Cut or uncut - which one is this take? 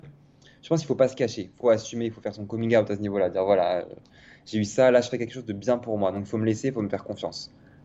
uncut